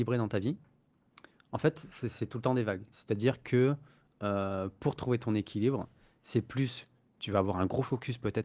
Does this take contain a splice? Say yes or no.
no